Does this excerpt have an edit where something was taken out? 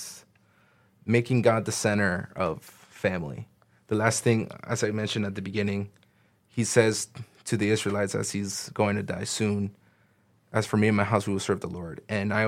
no; 0 cuts

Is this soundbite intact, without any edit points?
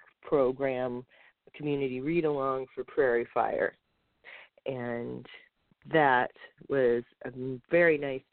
yes; 0 cuts

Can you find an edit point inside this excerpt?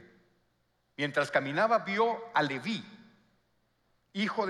no; 0 cuts

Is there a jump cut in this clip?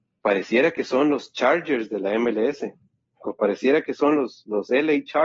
no; 0 cuts

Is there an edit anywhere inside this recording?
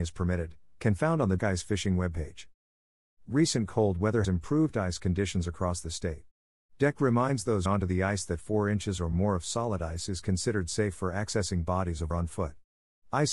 yes; 4 cuts; at 1.4 s, 4.2 s, 7.7 s, 12.1 s

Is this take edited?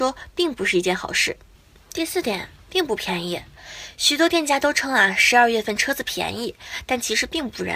no; 0 cuts

